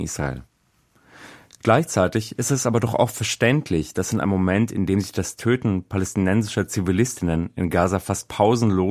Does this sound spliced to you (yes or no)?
no